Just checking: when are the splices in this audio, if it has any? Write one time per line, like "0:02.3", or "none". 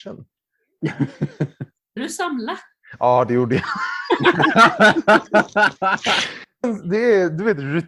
0:02.0
0:06.6